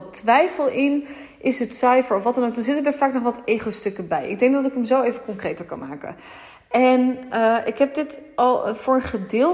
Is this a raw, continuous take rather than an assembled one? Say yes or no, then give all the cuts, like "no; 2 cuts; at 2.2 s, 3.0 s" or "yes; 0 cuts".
yes; 0 cuts